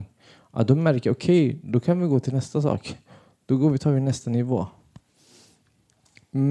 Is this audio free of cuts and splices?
yes; 0 cuts

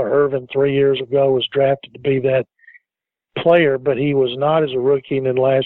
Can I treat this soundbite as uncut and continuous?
yes; 0 cuts

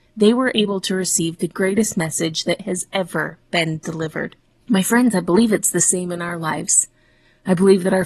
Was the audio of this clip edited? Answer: no; 0 cuts

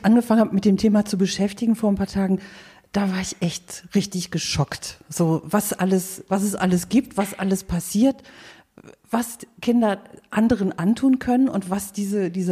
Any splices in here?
no; 0 cuts

